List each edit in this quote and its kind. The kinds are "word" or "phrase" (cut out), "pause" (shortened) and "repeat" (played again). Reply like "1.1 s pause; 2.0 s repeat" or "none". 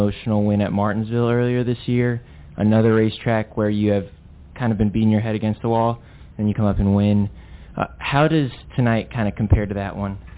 6.5 s word